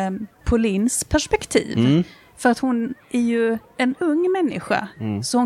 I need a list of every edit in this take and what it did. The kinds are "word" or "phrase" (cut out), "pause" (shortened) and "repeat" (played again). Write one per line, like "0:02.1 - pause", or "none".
none